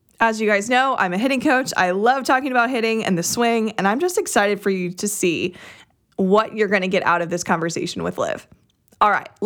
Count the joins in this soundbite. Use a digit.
0